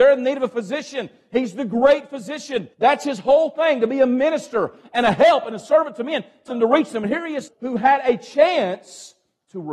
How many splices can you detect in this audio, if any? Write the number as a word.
three